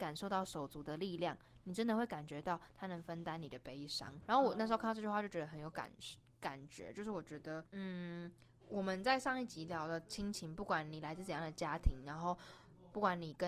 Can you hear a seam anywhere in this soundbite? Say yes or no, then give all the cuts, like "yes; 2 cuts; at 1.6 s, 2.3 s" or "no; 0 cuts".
no; 0 cuts